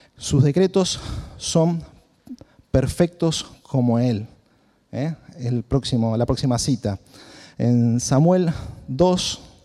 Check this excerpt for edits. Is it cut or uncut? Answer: uncut